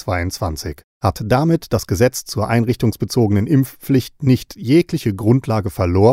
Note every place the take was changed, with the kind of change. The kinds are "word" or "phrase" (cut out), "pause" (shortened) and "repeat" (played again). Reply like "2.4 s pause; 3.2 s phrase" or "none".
0.9 s pause